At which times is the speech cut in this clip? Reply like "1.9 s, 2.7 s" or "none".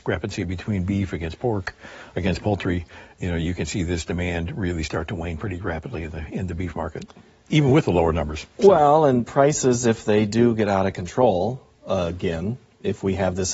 none